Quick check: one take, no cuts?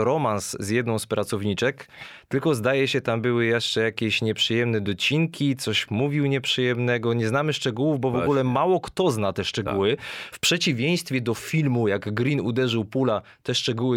yes; 0 cuts

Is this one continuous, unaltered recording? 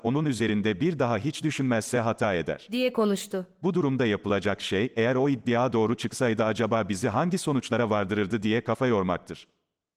yes; 0 cuts

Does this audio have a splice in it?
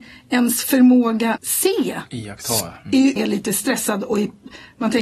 yes; 3 cuts; at 1.4 s, 2.8 s, 3.2 s

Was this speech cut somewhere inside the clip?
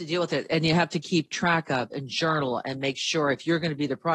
no; 0 cuts

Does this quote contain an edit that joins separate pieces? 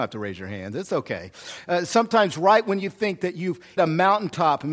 yes; 1 cut; at 3.8 s

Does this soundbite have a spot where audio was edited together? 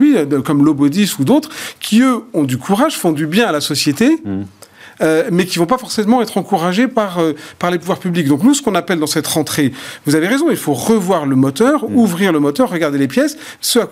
no; 0 cuts

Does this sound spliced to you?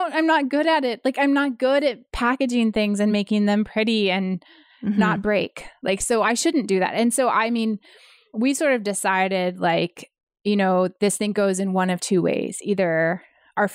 no; 0 cuts

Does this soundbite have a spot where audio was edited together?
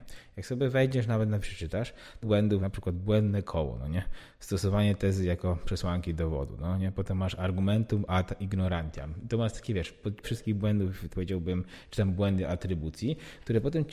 yes; 5 cuts; at 1.4 s, 2.2 s, 2.6 s, 10.2 s, 11.1 s

